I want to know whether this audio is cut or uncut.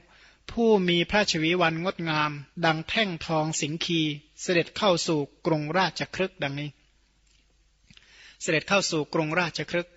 cut